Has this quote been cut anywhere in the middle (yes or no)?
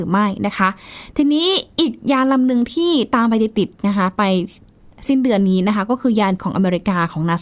yes